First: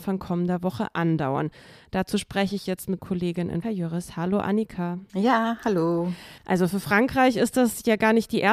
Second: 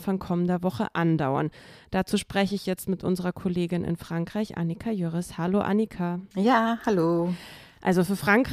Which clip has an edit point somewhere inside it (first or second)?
first